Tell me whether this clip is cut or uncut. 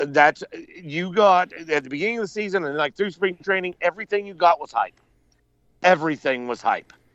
uncut